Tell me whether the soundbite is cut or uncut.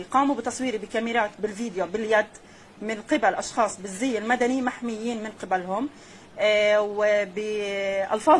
uncut